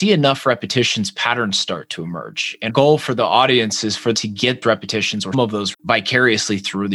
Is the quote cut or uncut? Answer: cut